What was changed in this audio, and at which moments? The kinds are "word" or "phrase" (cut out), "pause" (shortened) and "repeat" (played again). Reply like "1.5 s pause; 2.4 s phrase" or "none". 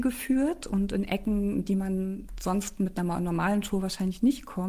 none